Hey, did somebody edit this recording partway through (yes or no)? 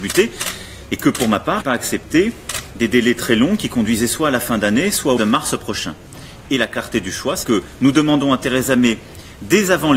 yes